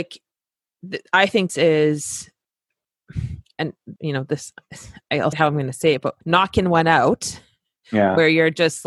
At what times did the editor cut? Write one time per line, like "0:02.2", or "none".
0:01.5
0:04.0
0:05.3
0:06.2